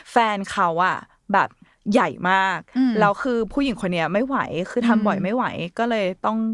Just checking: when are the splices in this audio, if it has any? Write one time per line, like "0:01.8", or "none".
none